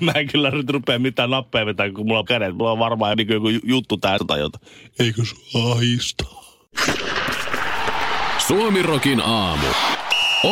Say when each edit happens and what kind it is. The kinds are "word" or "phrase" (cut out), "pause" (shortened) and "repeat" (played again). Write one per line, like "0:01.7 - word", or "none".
0:02.3 - word
0:03.1 - word
0:04.2 - word